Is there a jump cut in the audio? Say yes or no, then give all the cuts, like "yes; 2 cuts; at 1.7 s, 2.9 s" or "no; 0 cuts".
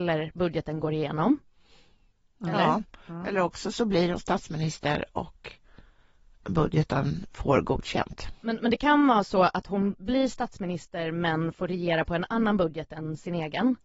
no; 0 cuts